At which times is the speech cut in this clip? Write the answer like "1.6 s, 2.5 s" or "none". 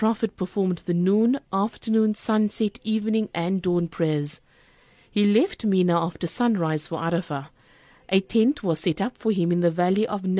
none